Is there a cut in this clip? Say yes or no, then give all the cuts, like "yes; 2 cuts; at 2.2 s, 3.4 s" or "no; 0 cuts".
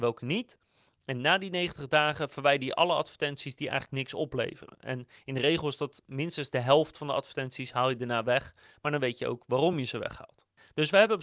no; 0 cuts